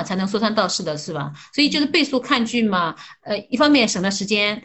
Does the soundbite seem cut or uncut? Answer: uncut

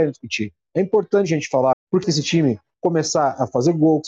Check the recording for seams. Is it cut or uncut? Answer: cut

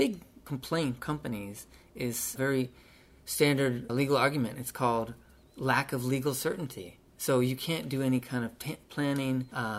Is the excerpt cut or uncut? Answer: cut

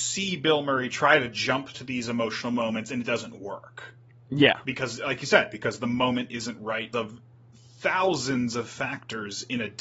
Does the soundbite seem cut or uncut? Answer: cut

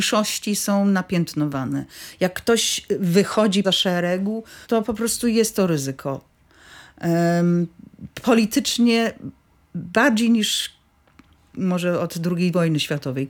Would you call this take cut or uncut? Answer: cut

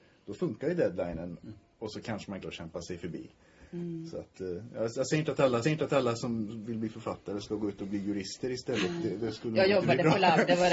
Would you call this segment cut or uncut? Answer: cut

